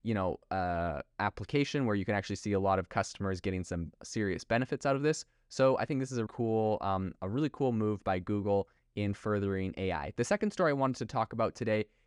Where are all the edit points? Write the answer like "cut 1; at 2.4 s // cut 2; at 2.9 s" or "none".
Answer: cut 1; at 6.3 s